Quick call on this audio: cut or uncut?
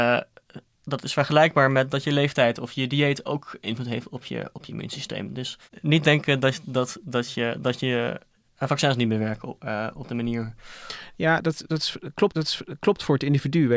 cut